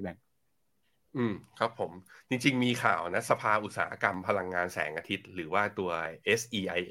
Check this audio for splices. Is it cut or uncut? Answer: uncut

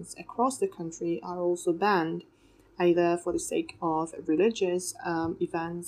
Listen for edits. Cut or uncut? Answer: uncut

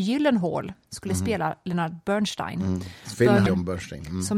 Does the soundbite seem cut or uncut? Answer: cut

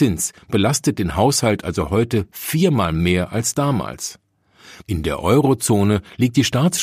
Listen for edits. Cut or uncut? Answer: uncut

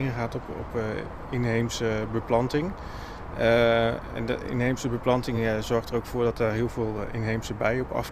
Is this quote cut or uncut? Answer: uncut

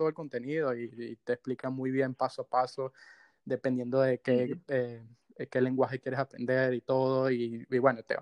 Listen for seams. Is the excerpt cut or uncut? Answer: uncut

